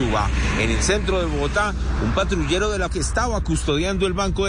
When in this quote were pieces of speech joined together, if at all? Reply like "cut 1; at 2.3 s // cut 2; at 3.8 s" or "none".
cut 1; at 2.9 s